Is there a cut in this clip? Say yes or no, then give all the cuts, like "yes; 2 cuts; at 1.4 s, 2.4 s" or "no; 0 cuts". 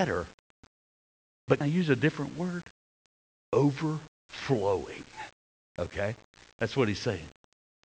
yes; 1 cut; at 1.6 s